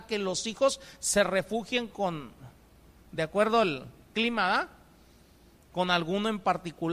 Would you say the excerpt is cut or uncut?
uncut